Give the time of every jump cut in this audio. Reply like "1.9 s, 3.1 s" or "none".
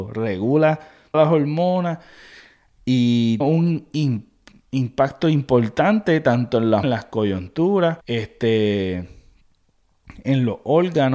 1.1 s, 3.4 s, 6.8 s, 8.0 s